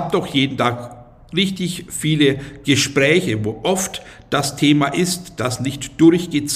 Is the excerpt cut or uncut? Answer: uncut